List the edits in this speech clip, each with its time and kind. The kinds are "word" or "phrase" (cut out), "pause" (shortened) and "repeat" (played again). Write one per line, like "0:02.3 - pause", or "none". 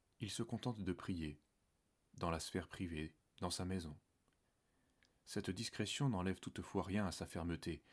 none

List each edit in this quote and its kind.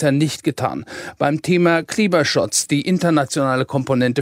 none

